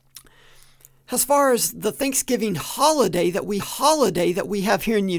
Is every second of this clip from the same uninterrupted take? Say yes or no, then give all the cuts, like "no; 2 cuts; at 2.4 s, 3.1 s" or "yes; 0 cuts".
no; 1 cut; at 3.6 s